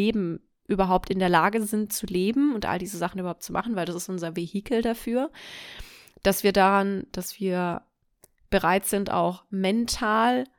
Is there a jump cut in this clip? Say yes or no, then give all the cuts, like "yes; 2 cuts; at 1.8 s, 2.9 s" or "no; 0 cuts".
no; 0 cuts